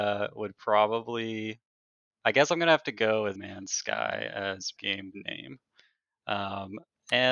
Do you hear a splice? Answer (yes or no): yes